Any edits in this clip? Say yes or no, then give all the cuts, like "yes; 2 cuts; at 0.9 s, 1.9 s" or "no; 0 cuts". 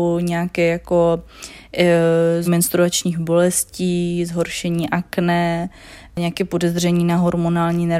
yes; 1 cut; at 2.5 s